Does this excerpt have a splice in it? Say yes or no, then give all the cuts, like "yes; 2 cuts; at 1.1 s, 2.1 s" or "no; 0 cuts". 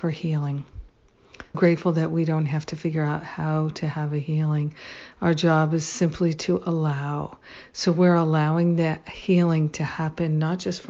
yes; 1 cut; at 1.5 s